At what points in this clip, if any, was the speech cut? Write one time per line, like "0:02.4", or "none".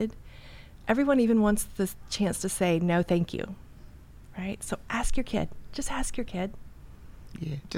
none